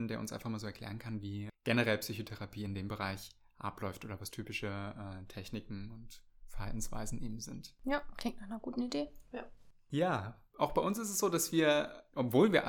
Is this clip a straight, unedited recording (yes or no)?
yes